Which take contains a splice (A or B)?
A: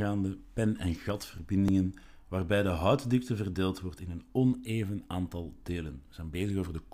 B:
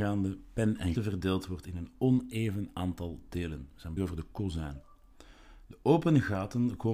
B